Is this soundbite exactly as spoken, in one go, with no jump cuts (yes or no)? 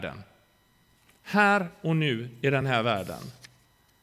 yes